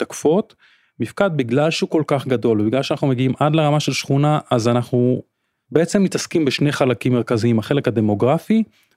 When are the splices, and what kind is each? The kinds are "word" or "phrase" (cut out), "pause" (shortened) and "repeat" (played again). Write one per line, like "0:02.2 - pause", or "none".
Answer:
none